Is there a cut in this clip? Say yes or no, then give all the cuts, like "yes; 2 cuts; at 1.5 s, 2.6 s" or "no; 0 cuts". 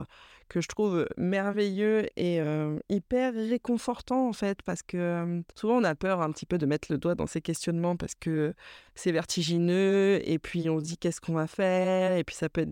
yes; 2 cuts; at 5.5 s, 8.9 s